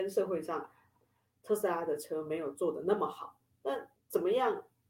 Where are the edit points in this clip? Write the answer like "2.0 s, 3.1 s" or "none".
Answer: 4.0 s